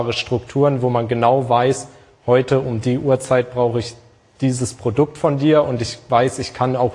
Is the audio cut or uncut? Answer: uncut